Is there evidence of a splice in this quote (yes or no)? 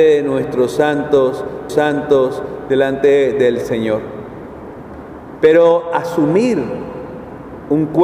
yes